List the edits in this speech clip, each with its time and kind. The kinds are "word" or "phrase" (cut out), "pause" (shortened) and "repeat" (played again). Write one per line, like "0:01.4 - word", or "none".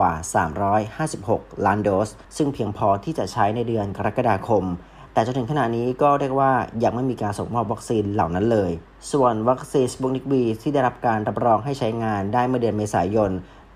0:02.2 - pause

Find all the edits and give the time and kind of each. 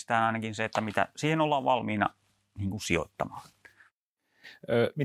none

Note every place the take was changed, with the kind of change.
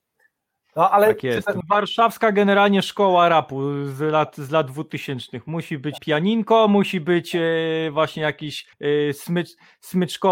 0:01.6 - word
0:06.0 - word
0:08.7 - pause

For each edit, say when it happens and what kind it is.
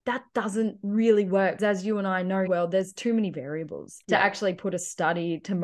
0:01.6 - word
0:02.5 - phrase
0:04.0 - pause

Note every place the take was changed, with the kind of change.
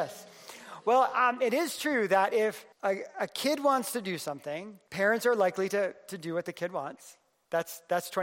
0:02.7 - pause
0:04.9 - pause

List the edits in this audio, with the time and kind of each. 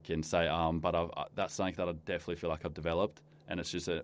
none

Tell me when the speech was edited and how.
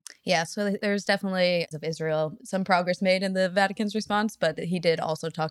0:01.7 - phrase

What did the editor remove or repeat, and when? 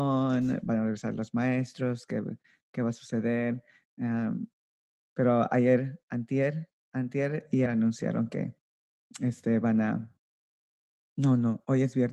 0:07.7 - word

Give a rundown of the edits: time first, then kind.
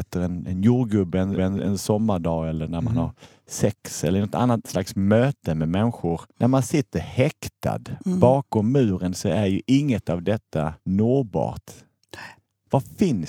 0:01.4 - repeat
0:06.3 - pause
0:10.8 - pause

